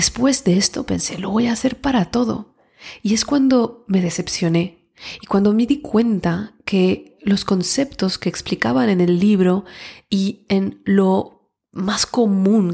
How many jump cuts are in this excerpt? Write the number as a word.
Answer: zero